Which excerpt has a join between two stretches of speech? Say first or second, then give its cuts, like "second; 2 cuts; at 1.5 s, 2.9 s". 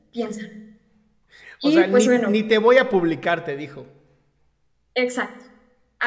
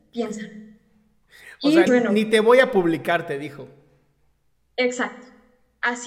second; 1 cut; at 1.9 s